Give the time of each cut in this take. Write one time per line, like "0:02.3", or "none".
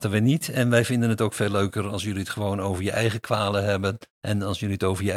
0:04.1

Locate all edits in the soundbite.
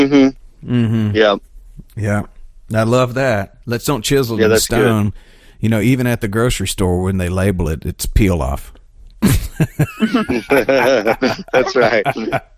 none

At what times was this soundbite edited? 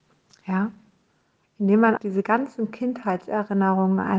0:02.0

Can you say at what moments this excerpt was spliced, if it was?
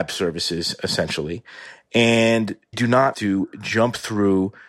0:02.7
0:03.1

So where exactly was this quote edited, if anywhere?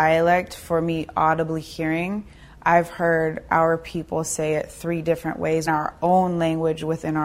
0:05.7

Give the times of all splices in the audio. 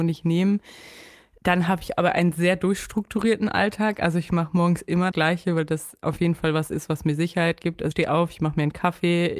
0:05.1
0:07.9

